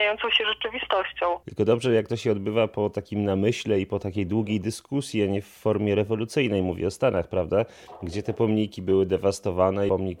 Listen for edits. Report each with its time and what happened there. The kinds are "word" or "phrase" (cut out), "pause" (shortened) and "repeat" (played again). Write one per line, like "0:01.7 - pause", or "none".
none

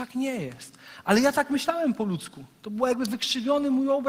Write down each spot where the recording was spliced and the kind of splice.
none

